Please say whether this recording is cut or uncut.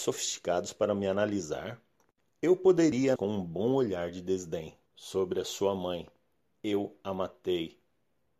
cut